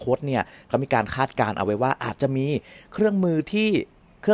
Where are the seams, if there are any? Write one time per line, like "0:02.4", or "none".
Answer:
none